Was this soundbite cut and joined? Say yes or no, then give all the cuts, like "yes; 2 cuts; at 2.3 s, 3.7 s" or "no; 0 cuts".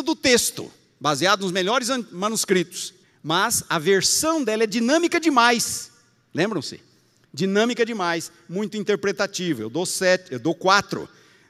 yes; 1 cut; at 3.0 s